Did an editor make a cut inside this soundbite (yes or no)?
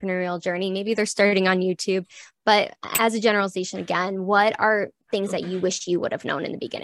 no